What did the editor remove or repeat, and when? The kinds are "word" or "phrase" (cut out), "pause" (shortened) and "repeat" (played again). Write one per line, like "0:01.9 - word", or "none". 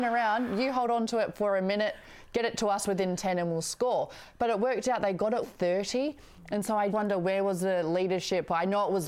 0:05.4 - word
0:06.9 - word